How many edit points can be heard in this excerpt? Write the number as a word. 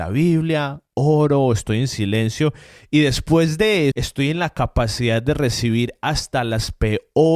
one